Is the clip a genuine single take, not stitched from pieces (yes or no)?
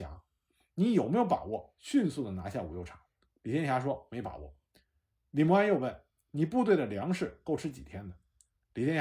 no